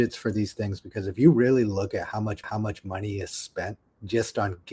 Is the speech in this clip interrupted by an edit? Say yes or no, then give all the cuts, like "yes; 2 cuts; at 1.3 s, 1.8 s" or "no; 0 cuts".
yes; 1 cut; at 2.4 s